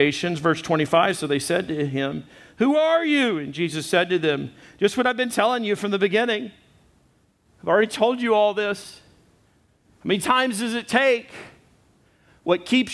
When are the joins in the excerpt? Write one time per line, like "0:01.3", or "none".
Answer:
none